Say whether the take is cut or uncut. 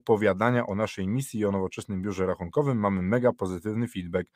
uncut